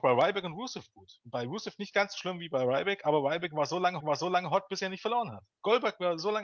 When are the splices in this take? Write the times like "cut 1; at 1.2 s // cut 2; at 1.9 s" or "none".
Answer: cut 1; at 4.0 s